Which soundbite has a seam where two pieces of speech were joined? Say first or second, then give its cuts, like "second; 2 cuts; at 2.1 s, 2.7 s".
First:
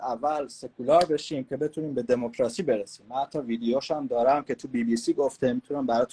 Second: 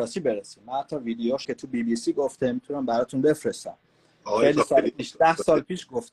second; 1 cut; at 1.4 s